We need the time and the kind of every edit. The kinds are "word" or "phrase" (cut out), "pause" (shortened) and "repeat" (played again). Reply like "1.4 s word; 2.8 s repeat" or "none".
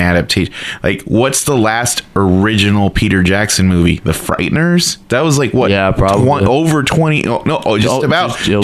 5.0 s pause